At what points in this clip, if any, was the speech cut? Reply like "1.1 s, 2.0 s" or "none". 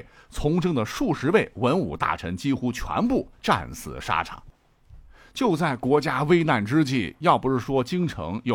none

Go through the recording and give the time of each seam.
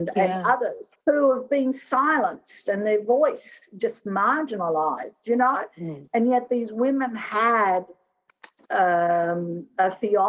1.0 s

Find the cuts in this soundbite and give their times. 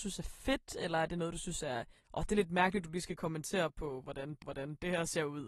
2.0 s, 4.4 s

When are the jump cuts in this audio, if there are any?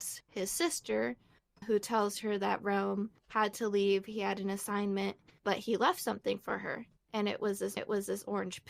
1.6 s, 3.2 s, 5.4 s, 7.0 s, 7.8 s

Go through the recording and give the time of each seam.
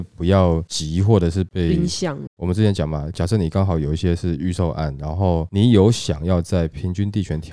2.3 s

